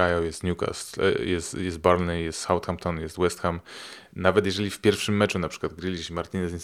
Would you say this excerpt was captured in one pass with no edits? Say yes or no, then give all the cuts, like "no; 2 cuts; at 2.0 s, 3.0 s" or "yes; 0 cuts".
yes; 0 cuts